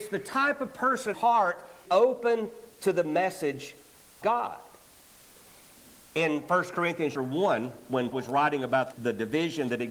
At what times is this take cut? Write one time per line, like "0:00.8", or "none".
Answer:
0:01.1
0:01.8
0:04.2
0:07.1
0:08.1
0:08.9